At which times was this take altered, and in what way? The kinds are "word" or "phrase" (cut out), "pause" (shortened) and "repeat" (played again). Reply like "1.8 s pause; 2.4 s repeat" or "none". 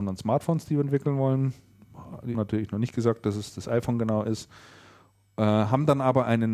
2.3 s word

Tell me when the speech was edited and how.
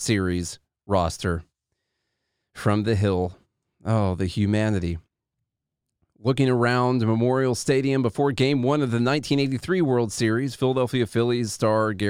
none

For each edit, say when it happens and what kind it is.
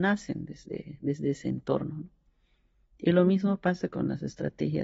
none

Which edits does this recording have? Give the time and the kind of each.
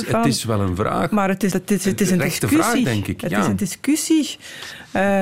1.5 s word

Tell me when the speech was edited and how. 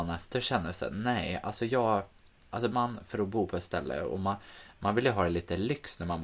2.7 s word

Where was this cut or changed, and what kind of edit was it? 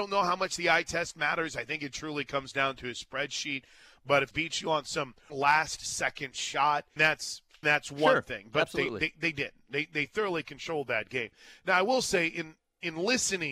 4.3 s word; 5.3 s word; 7.0 s word; 7.6 s word

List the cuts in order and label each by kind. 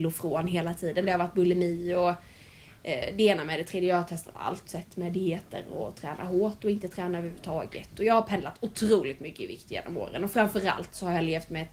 4.6 s phrase

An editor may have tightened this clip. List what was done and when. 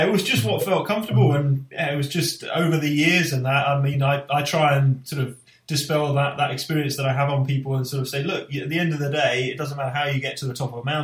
none

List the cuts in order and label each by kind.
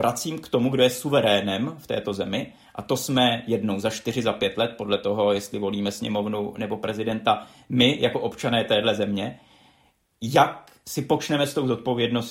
none

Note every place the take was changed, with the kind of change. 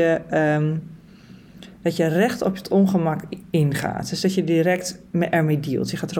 none

